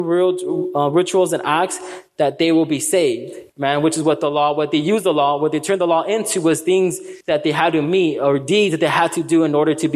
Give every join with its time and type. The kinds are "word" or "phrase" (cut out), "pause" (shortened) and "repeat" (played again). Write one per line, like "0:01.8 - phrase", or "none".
0:03.5 - pause
0:07.2 - pause